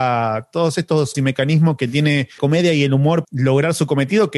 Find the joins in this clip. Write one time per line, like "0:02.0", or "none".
0:01.1
0:02.4
0:03.2